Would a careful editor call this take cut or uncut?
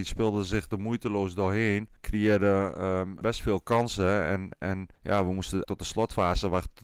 cut